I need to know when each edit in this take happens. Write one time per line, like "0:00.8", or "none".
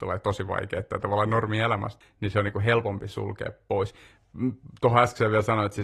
0:02.0